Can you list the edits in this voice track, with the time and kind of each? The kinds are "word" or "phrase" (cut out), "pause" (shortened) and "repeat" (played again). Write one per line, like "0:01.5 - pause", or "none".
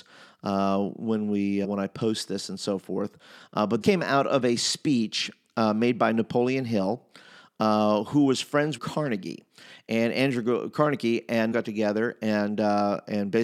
0:01.6 - word
0:03.8 - word
0:08.8 - phrase
0:11.5 - phrase